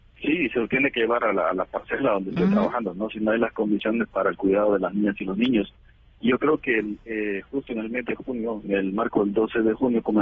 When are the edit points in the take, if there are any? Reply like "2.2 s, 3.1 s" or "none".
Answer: none